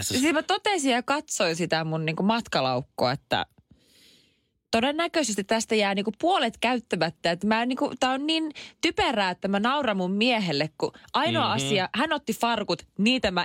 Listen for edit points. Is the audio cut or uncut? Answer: uncut